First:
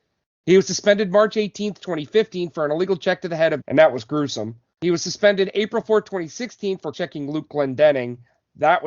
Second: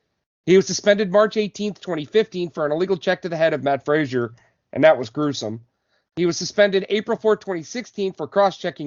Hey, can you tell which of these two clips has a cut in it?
first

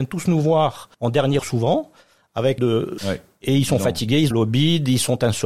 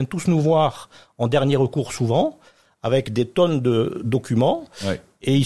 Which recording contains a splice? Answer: first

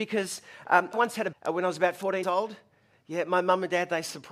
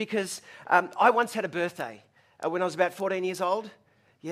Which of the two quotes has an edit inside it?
first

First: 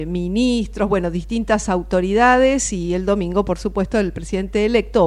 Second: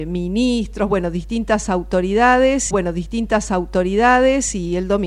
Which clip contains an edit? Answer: second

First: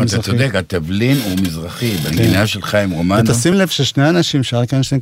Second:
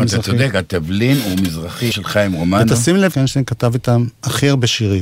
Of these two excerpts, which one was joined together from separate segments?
second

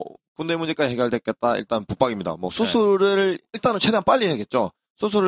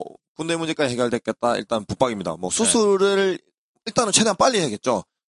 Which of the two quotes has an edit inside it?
first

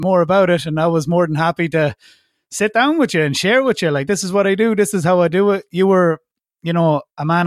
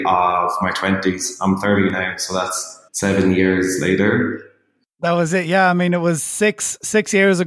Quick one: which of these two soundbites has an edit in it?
second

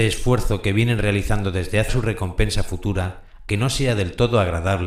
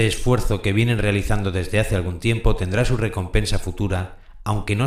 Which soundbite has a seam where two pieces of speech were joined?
first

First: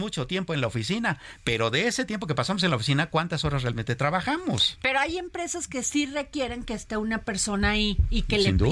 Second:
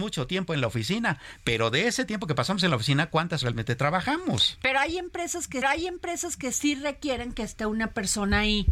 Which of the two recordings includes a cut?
second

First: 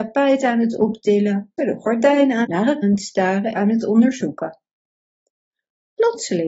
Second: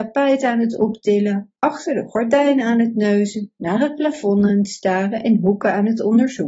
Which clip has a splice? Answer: first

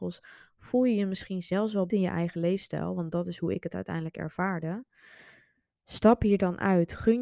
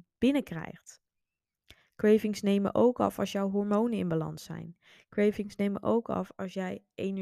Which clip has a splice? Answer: first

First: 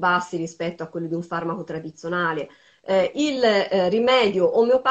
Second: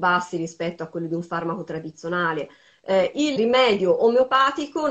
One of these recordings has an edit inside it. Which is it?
second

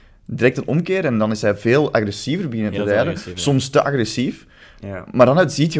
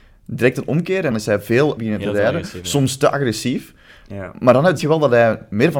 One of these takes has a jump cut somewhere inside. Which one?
second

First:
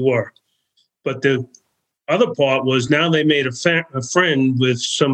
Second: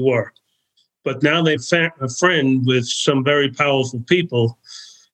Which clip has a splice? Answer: second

